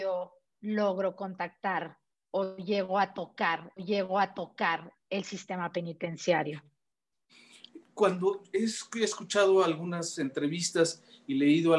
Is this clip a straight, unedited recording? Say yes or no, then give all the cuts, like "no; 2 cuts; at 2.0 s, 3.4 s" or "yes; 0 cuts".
no; 2 cuts; at 3.8 s, 7.8 s